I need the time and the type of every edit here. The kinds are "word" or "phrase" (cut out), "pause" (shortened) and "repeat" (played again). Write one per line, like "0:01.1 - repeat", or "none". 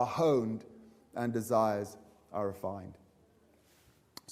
none